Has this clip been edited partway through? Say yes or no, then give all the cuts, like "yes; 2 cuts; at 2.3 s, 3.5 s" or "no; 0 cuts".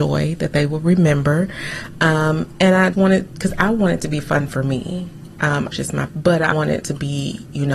yes; 5 cuts; at 2.9 s, 5.7 s, 6.1 s, 6.5 s, 6.8 s